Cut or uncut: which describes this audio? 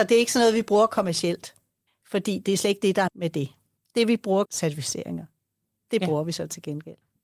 cut